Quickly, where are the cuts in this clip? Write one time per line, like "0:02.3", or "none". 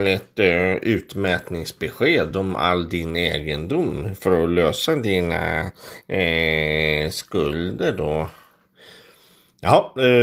none